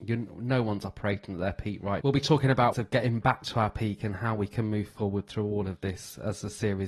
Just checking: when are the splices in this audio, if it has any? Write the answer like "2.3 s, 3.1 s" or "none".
2.0 s, 2.7 s